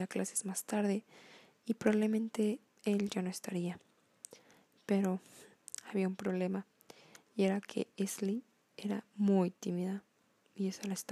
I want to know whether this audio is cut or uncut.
uncut